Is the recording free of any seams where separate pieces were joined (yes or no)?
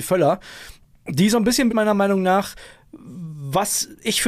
no